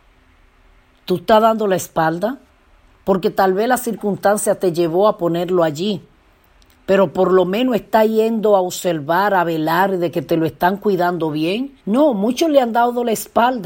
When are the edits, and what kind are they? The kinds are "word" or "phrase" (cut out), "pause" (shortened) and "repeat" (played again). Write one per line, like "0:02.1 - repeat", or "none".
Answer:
0:11.8 - pause